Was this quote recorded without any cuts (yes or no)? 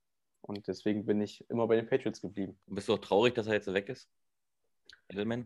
no